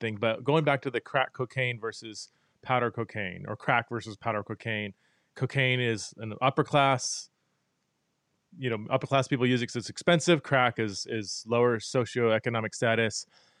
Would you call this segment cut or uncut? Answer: uncut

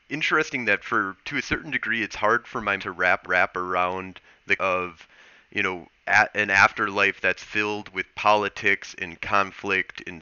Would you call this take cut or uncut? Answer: cut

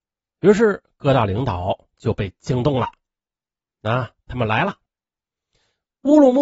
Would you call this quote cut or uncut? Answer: uncut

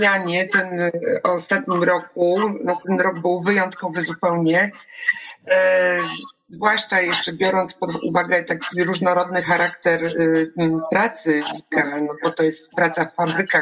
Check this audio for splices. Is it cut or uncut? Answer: uncut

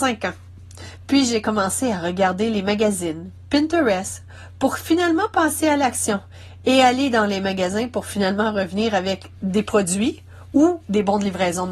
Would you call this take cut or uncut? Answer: uncut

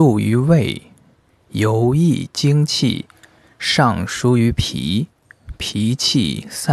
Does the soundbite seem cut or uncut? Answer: uncut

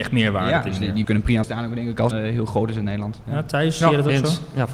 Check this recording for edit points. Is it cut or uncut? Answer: cut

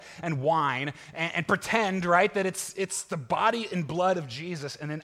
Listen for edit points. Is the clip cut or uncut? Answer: uncut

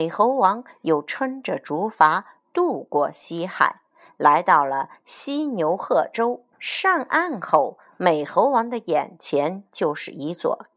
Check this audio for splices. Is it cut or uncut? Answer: cut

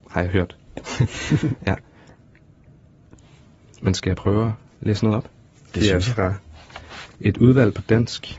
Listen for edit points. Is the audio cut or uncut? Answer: uncut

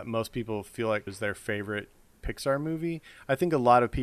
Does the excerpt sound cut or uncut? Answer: cut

